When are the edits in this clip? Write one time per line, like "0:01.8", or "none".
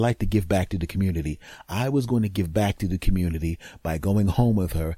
none